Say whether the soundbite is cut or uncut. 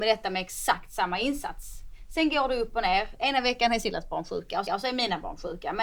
cut